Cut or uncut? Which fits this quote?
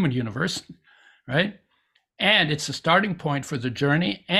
uncut